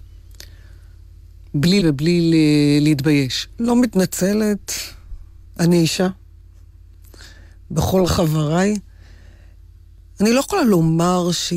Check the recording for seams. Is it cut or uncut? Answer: cut